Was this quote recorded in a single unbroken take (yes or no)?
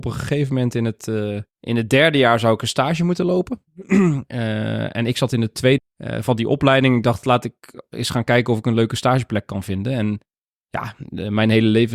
no